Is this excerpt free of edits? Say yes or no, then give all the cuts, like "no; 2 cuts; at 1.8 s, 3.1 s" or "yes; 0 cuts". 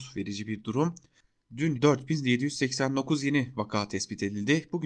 no; 1 cut; at 1.7 s